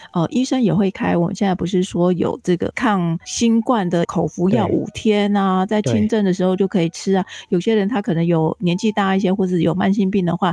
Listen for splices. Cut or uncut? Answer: cut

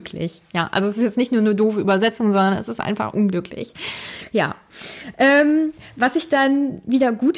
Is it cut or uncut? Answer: uncut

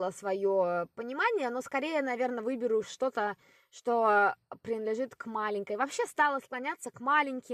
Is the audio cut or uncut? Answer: uncut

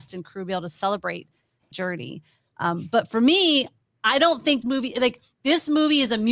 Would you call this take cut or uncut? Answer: cut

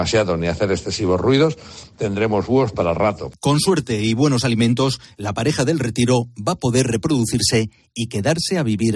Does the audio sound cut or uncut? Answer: uncut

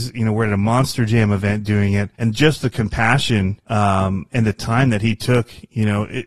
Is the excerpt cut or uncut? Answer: cut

